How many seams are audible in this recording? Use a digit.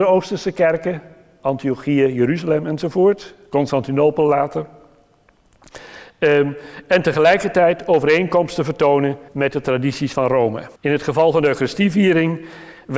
2